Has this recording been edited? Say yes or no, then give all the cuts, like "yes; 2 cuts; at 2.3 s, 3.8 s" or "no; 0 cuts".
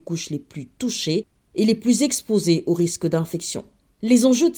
no; 0 cuts